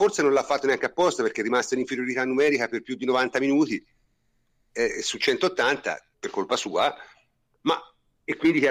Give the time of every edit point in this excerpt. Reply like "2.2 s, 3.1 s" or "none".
6.1 s